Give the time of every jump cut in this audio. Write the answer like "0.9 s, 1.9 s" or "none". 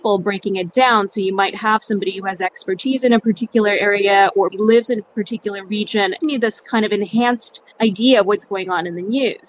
4.5 s, 6.2 s, 7.7 s